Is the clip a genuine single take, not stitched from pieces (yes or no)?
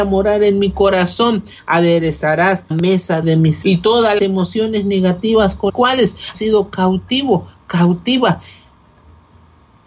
no